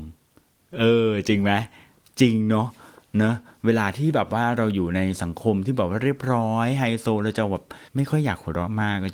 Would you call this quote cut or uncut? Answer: cut